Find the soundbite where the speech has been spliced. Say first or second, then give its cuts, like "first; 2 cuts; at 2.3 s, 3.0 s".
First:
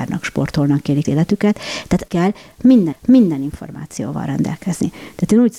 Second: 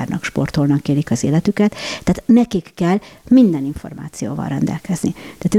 first; 3 cuts; at 1.0 s, 2.1 s, 2.9 s